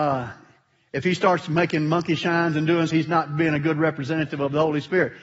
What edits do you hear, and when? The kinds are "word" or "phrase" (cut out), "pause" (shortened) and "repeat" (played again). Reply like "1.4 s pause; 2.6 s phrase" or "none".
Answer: 2.9 s word